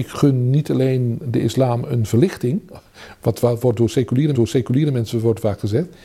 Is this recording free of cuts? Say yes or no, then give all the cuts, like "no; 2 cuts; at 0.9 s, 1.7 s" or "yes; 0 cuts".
no; 1 cut; at 4.3 s